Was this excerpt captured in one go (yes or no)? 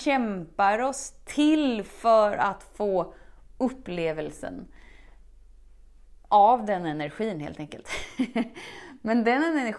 yes